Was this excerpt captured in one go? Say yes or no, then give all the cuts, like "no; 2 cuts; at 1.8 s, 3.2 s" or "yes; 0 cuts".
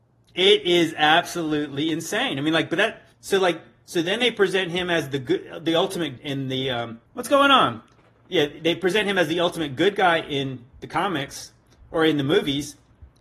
no; 3 cuts; at 3.1 s, 6.2 s, 7.1 s